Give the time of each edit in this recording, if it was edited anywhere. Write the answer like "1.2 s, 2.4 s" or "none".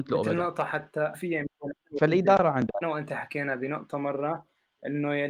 1.1 s, 2.8 s